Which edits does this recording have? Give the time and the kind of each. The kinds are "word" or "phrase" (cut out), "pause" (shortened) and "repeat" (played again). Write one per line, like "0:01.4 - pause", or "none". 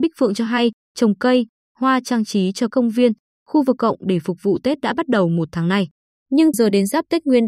0:02.7 - word
0:03.8 - word
0:06.5 - word

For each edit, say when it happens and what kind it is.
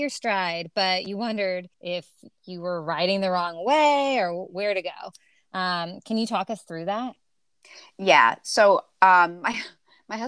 0:01.7 - pause

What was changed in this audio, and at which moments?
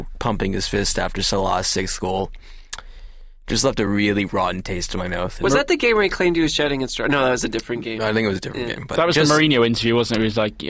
none

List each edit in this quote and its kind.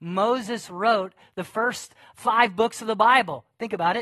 none

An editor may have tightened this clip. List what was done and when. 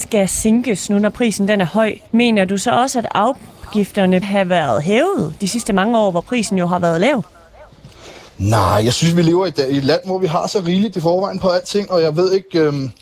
0:02.1 - pause
0:04.2 - word
0:08.3 - pause
0:10.9 - phrase

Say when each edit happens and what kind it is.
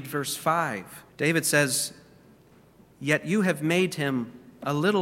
0:01.1 - pause

